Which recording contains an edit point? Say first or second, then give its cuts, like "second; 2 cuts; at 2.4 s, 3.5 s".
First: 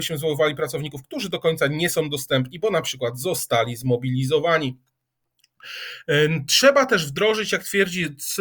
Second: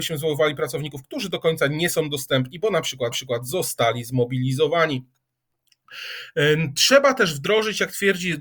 second; 1 cut; at 3.1 s